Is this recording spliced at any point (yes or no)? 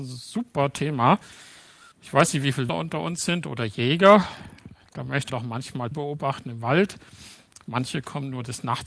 yes